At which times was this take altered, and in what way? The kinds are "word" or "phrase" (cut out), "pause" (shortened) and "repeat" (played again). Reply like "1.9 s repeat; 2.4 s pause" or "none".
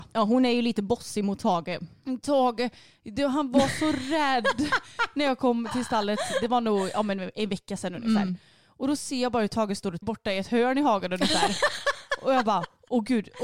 10.0 s word